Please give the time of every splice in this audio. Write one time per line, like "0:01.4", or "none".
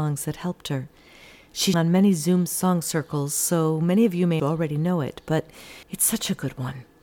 0:01.7
0:04.4
0:05.8